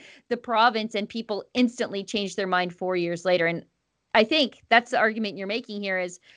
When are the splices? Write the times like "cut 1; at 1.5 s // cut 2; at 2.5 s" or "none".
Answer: none